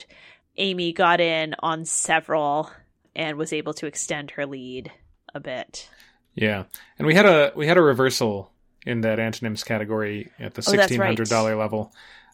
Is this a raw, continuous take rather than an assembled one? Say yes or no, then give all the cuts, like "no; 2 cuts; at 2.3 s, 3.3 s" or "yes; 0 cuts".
yes; 0 cuts